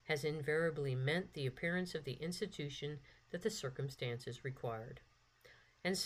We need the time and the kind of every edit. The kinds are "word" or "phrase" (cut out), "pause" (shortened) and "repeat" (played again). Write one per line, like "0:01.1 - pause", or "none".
none